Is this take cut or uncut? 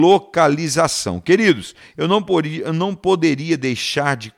uncut